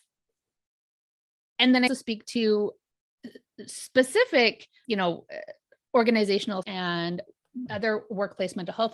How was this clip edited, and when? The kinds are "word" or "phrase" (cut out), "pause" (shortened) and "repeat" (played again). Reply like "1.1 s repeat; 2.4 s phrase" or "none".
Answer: 1.9 s word; 4.8 s word; 6.6 s word; 7.7 s word